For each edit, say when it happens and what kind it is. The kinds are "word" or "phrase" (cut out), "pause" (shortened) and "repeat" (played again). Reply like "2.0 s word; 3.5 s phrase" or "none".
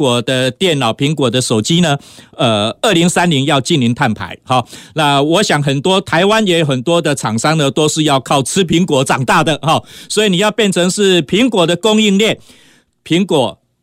none